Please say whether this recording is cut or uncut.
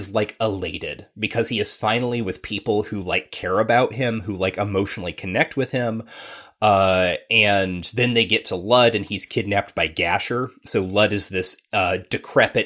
uncut